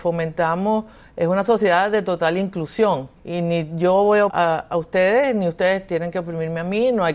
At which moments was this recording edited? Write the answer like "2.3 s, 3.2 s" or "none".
3.2 s, 4.3 s